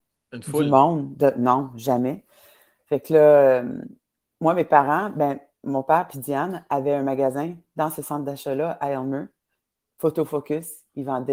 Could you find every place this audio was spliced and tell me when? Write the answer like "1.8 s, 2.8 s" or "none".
none